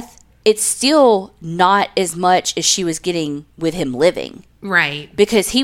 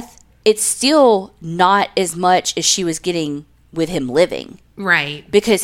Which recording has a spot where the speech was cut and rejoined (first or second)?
first